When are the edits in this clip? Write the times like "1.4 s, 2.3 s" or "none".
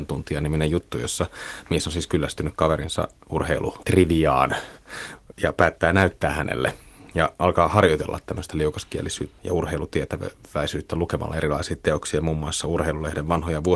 9.4 s